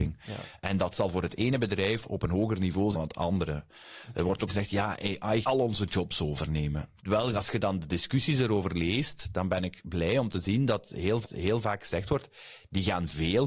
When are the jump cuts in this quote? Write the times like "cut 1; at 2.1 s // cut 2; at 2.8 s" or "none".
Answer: cut 1; at 2.9 s // cut 2; at 4.5 s // cut 3; at 5.4 s // cut 4; at 7.0 s // cut 5; at 11.2 s